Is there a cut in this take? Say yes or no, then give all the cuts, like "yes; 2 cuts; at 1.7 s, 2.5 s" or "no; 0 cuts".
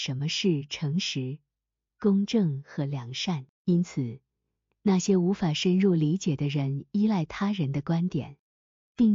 yes; 1 cut; at 3.5 s